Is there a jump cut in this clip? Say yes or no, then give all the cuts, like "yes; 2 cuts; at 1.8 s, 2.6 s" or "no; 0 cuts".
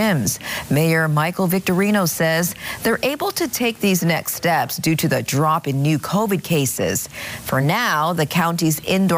no; 0 cuts